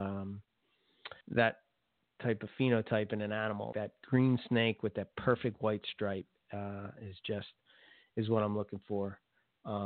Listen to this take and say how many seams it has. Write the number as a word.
two